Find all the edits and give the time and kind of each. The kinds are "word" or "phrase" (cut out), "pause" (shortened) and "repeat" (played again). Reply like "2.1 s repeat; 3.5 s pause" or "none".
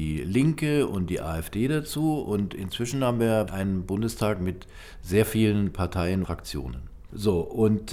3.5 s word; 6.2 s word